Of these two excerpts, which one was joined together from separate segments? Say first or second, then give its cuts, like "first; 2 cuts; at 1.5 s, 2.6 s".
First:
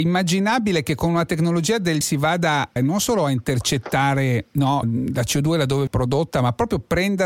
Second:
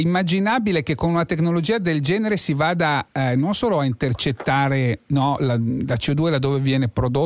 first; 4 cuts; at 2.0 s, 2.8 s, 4.8 s, 5.9 s